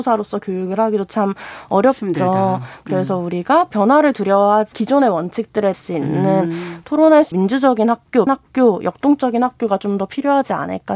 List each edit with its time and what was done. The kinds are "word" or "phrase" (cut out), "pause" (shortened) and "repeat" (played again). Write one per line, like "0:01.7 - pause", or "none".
0:04.7 - phrase
0:05.7 - phrase
0:07.3 - word
0:08.3 - word